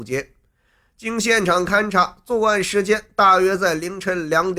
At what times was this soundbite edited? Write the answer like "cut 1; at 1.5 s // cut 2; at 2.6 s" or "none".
none